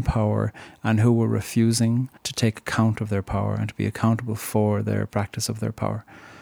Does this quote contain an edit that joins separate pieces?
yes; 1 cut; at 2.2 s

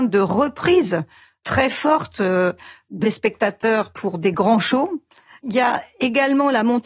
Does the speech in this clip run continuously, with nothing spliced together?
no; 1 cut; at 3.0 s

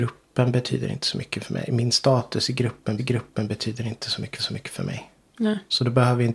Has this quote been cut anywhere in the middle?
yes; 2 cuts; at 3.0 s, 4.4 s

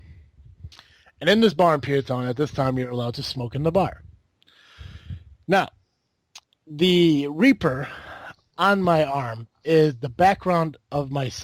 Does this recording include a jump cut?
no; 0 cuts

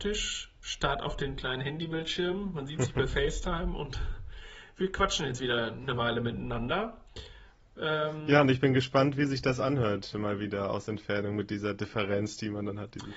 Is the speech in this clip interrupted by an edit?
no; 0 cuts

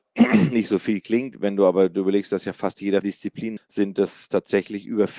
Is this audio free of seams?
no; 2 cuts; at 3.0 s, 3.6 s

